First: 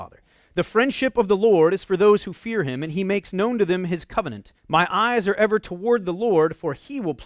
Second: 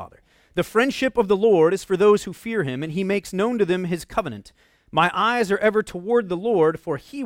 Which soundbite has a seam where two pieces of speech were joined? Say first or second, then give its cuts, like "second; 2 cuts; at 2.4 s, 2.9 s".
first; 1 cut; at 4.6 s